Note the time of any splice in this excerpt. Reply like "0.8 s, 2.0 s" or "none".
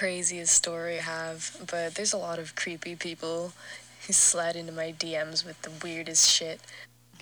1.0 s